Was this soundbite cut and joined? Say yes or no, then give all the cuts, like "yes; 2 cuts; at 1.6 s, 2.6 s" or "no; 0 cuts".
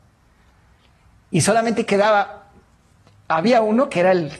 no; 0 cuts